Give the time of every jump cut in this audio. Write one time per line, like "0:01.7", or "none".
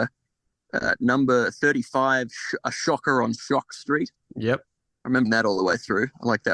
0:05.3